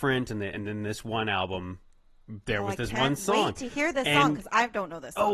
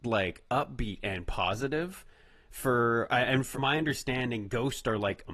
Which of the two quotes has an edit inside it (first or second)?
second